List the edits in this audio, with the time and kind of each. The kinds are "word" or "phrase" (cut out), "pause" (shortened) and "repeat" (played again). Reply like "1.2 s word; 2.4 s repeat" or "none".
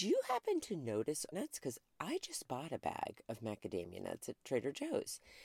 1.3 s phrase